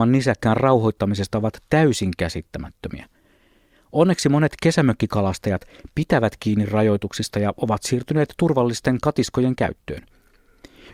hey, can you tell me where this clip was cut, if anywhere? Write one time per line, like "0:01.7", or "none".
none